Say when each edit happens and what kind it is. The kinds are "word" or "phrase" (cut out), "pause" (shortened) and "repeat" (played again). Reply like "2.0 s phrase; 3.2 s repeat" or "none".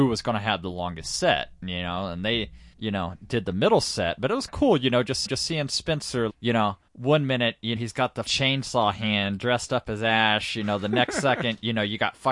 2.7 s pause; 4.5 s word; 5.3 s repeat; 6.3 s word; 6.9 s pause; 7.8 s word; 8.3 s word